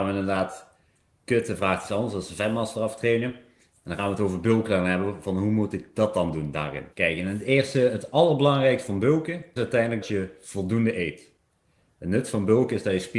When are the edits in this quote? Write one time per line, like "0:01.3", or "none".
0:06.9
0:09.6
0:10.0